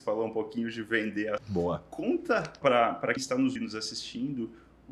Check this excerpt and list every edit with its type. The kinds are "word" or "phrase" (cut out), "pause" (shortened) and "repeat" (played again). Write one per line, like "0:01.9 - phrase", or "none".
0:01.4 - word
0:02.6 - word
0:03.2 - word
0:03.6 - word